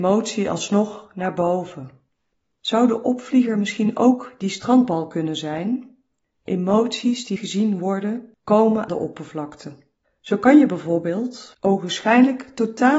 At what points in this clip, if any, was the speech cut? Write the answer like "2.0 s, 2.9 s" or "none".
7.4 s, 8.9 s